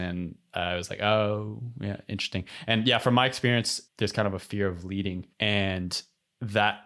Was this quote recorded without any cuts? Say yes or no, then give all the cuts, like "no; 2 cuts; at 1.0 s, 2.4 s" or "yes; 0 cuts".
no; 2 cuts; at 3.9 s, 5.3 s